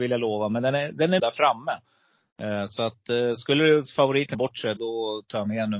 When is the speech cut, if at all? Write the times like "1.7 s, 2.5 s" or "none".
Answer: 1.2 s, 4.3 s, 4.8 s

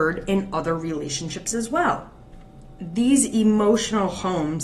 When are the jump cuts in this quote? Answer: none

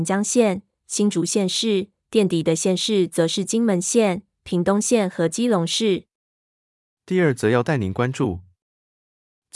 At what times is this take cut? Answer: none

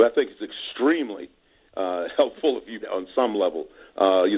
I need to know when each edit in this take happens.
2.8 s

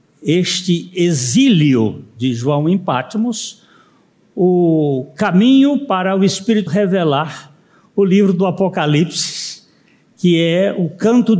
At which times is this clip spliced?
6.7 s

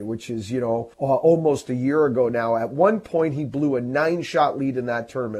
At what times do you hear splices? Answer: 0.9 s

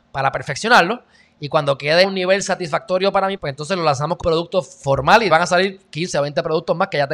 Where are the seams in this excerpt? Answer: 2.0 s, 3.4 s, 4.2 s, 4.8 s, 5.3 s

